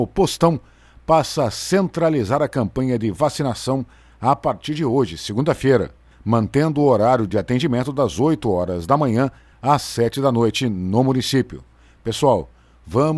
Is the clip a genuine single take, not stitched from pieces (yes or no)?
yes